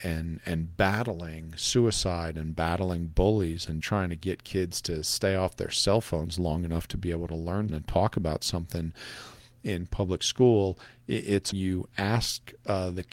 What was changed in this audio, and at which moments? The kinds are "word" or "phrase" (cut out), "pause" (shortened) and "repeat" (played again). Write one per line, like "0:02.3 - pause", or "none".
0:03.8 - word
0:07.7 - word
0:11.5 - phrase